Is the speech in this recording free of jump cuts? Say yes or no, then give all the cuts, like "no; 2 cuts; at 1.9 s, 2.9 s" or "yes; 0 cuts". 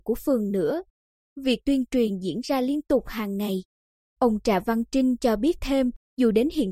yes; 0 cuts